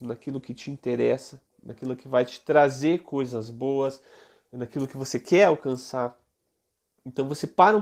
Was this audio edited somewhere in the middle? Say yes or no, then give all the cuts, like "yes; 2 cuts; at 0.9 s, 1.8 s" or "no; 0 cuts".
no; 0 cuts